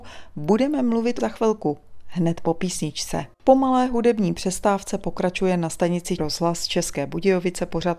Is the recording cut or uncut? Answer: cut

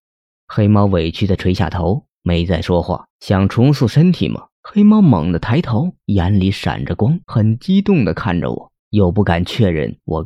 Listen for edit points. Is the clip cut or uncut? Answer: cut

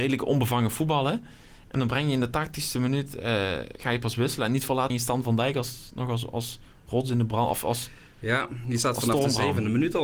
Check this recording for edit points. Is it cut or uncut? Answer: cut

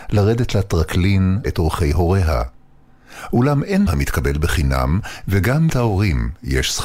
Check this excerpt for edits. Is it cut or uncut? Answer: cut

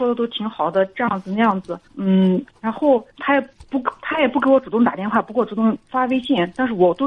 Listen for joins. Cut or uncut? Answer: cut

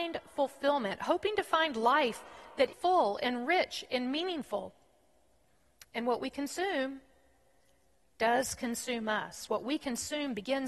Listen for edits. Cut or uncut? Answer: cut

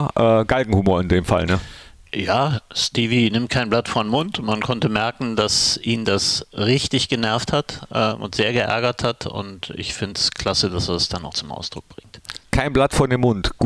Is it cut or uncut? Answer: cut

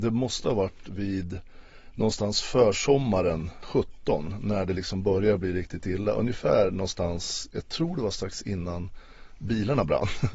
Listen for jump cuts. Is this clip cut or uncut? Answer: cut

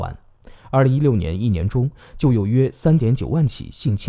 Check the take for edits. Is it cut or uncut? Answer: uncut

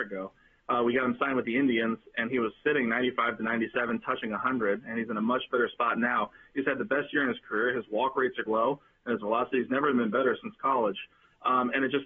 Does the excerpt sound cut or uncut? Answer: cut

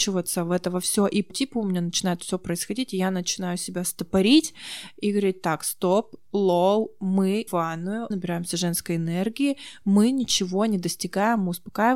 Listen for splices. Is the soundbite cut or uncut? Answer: cut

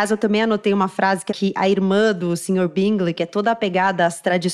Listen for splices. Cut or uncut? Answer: cut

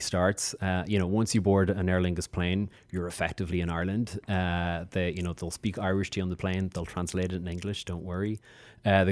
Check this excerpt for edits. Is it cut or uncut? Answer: uncut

